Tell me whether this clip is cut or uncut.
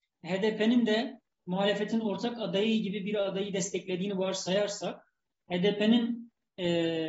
uncut